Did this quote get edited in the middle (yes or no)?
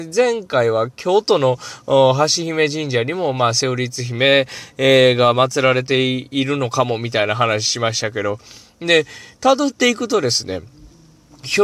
no